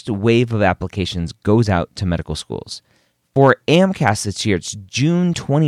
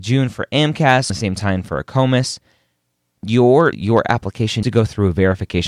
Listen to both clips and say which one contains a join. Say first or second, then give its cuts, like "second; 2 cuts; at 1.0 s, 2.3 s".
second; 3 cuts; at 1.1 s, 3.7 s, 4.6 s